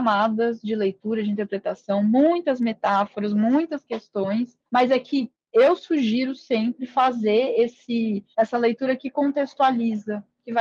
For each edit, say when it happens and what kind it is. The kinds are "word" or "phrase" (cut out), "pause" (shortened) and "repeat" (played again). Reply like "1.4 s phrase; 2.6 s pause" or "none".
4.7 s pause; 8.3 s pause